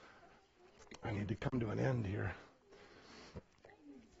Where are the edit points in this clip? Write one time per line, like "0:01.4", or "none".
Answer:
none